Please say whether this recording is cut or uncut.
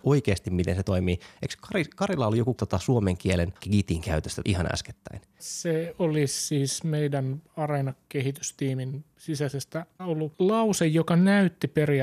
cut